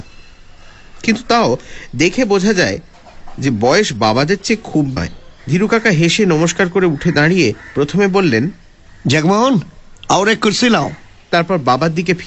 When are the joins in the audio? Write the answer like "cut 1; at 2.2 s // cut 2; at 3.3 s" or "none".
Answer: cut 1; at 5.0 s // cut 2; at 5.4 s